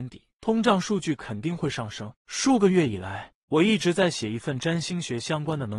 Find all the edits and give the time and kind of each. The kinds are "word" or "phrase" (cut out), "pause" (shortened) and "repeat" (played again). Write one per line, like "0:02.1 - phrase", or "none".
0:02.2 - pause